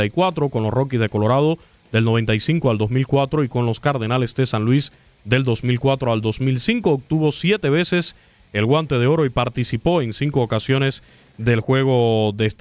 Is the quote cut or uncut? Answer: uncut